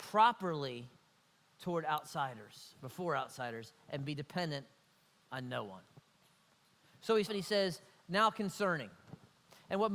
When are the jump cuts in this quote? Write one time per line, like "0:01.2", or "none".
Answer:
0:07.3

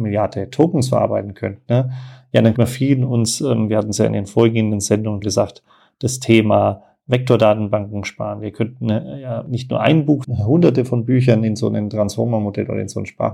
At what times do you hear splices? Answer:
0:02.5
0:05.2
0:10.2

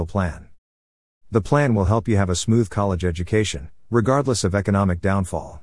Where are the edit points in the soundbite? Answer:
none

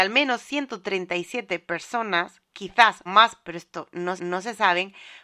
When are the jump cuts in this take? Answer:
0:03.1
0:04.2

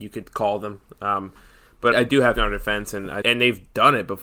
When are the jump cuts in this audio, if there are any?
0:01.9
0:02.4
0:03.2

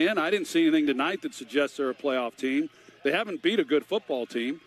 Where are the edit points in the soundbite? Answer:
none

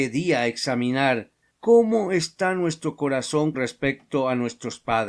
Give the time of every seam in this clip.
0:03.5

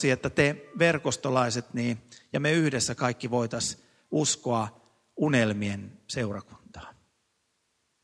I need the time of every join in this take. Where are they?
none

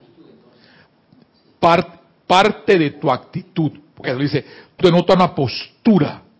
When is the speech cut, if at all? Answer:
0:04.0
0:04.8

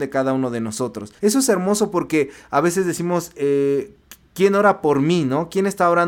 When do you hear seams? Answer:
0:01.2

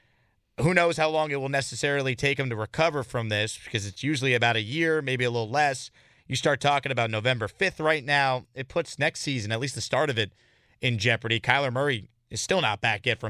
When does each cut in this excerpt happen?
none

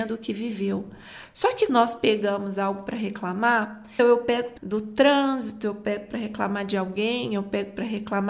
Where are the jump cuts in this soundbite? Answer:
0:01.7
0:04.0
0:04.6

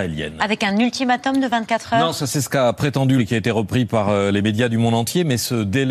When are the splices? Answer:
0:03.2

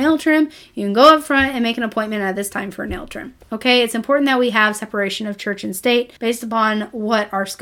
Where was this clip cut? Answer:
0:06.2

